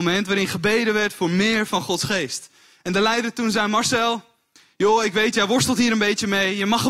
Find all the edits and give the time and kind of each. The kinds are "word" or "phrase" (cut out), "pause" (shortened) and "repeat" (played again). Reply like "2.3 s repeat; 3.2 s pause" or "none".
none